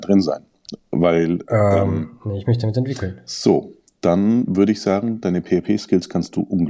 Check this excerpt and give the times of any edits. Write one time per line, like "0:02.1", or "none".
none